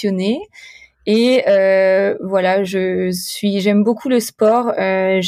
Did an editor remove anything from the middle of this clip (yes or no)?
no